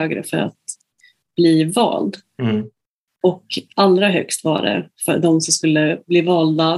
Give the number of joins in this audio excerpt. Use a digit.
0